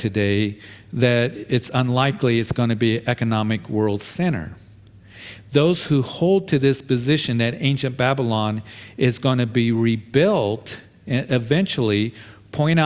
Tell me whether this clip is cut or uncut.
uncut